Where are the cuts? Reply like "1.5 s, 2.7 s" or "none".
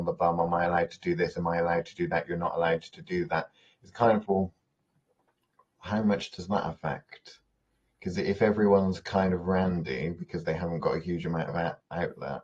4.3 s